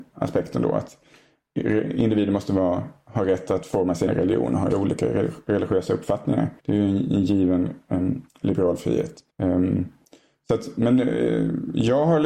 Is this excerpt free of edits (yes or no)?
no